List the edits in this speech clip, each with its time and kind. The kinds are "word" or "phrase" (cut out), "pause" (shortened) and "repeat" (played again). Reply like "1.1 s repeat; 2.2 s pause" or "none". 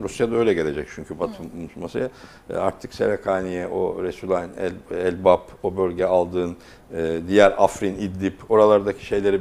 none